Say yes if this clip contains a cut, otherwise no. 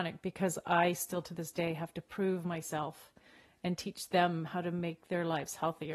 no